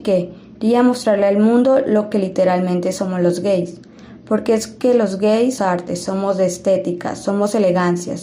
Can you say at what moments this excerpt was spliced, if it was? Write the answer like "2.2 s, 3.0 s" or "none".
5.6 s